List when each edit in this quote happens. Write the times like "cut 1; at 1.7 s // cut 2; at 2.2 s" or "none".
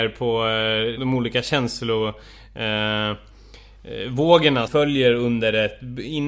cut 1; at 1.0 s // cut 2; at 4.7 s